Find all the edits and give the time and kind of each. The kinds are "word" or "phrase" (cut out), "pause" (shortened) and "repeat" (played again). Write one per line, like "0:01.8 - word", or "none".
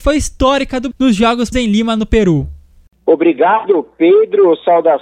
0:00.9 - word
0:01.5 - word